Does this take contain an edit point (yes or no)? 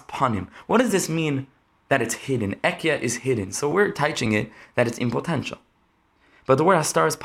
no